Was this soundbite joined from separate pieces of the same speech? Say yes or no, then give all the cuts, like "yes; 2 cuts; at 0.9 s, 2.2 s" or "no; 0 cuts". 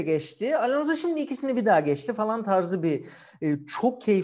no; 0 cuts